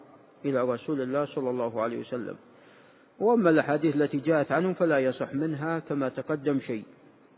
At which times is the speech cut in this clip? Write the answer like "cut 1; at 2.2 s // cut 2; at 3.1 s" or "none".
none